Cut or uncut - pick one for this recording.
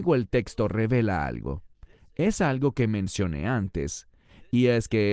uncut